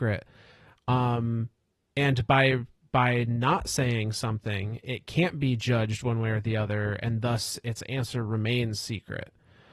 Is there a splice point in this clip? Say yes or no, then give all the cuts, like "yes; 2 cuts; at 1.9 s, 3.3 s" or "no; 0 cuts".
no; 0 cuts